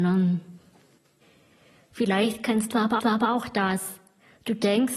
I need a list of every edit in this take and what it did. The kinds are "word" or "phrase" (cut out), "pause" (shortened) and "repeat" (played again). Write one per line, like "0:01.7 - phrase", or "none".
0:01.0 - pause
0:03.0 - repeat